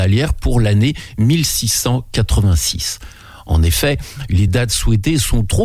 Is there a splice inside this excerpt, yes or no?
no